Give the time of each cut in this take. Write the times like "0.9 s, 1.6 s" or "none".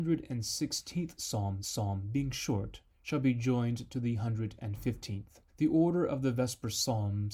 1.6 s, 2.9 s, 5.5 s